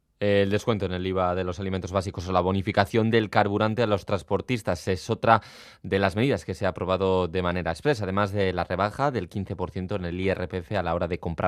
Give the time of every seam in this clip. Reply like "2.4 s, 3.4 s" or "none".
none